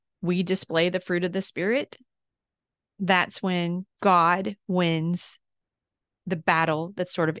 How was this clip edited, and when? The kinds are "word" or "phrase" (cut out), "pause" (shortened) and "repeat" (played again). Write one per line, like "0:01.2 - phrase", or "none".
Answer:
0:03.9 - pause